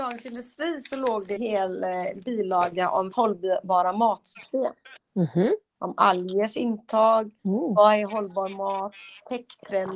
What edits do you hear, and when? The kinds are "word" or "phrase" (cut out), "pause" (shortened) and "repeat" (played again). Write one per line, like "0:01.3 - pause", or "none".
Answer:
0:01.4 - word
0:03.1 - word
0:05.0 - pause
0:07.4 - pause